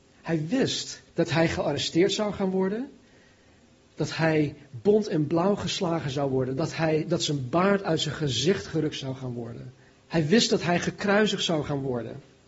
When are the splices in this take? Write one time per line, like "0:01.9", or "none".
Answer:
0:01.1
0:09.9